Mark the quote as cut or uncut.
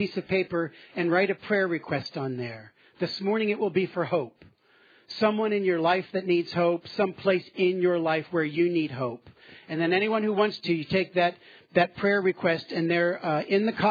uncut